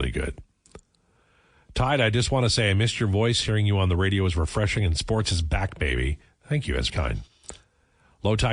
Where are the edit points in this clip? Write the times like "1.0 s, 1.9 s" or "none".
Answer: 6.9 s